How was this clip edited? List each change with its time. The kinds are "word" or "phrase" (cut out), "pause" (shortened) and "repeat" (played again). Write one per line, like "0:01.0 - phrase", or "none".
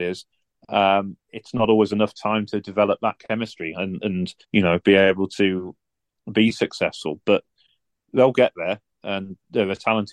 0:04.4 - pause